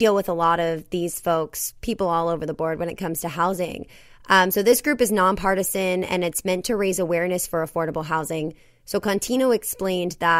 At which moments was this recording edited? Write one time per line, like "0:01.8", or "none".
none